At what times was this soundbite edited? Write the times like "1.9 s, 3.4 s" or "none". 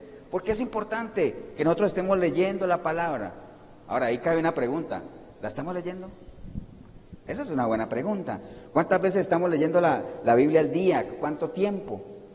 none